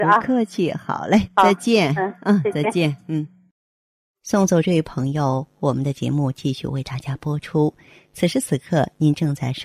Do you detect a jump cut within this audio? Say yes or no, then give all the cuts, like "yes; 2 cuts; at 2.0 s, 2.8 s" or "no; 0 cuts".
no; 0 cuts